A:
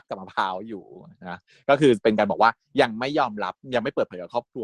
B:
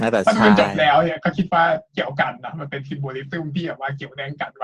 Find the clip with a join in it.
B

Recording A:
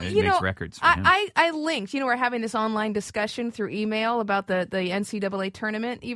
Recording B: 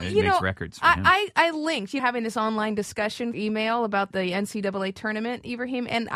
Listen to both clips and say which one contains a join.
B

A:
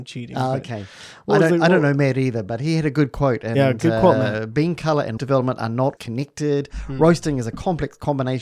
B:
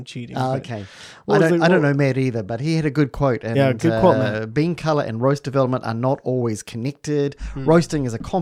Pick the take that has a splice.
A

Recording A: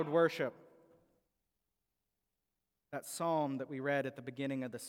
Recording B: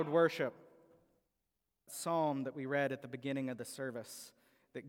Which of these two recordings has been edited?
B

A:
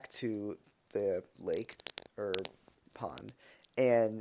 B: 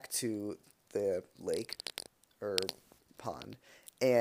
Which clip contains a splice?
A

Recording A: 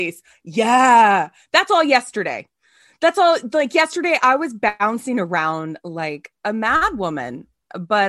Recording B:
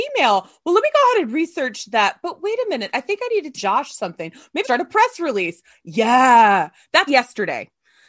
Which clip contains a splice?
B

